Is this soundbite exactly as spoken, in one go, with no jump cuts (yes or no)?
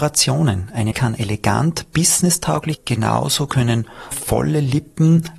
no